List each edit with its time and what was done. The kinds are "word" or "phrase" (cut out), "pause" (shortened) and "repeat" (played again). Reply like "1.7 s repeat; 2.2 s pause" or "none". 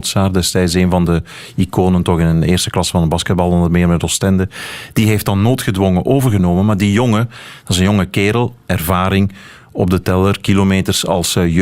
none